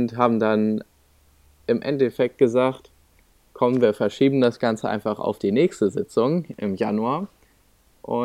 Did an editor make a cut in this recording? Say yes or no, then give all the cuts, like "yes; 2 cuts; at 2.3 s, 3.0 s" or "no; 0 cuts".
no; 0 cuts